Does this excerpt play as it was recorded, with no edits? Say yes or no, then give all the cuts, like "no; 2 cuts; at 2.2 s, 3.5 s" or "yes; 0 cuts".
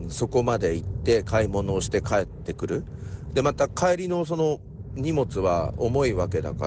yes; 0 cuts